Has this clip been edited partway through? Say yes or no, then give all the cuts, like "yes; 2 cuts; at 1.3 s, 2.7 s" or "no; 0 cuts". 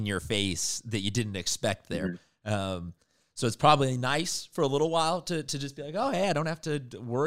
no; 0 cuts